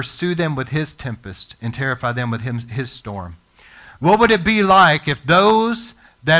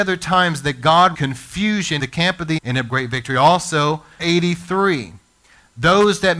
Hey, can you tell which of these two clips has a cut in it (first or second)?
second